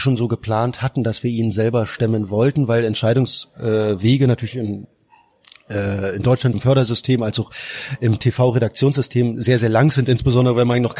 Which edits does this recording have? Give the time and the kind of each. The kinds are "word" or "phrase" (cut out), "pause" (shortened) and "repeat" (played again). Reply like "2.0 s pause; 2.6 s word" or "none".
6.5 s word